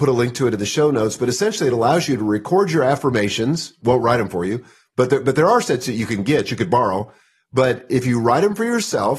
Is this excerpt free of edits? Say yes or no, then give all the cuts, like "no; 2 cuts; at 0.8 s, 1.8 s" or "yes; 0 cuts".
yes; 0 cuts